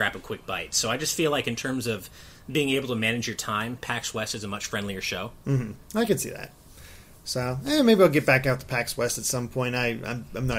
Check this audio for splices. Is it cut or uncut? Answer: uncut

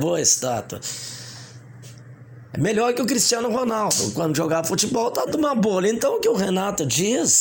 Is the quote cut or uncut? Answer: cut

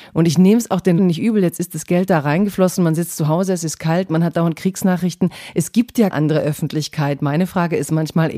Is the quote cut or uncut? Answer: cut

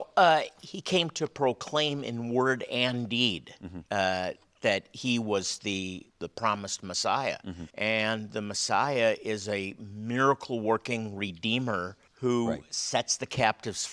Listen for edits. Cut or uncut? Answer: cut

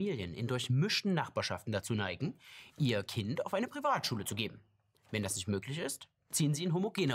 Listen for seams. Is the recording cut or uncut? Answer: uncut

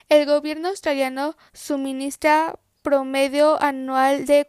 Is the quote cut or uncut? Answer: cut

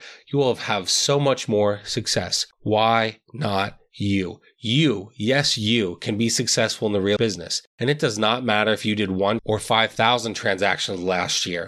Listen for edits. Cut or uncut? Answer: cut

